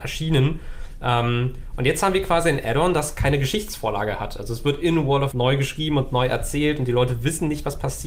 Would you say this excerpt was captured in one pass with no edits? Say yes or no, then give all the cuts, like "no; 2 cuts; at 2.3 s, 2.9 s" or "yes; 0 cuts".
no; 1 cut; at 5.3 s